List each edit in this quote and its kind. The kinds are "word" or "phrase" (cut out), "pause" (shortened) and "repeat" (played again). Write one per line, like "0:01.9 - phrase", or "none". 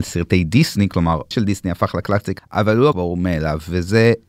0:01.3 - word
0:02.4 - word
0:02.9 - word